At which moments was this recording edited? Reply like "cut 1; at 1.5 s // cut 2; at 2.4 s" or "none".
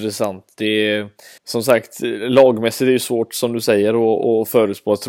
cut 1; at 1.4 s